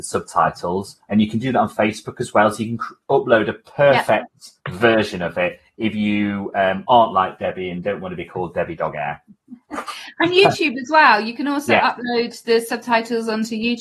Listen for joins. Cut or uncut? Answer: cut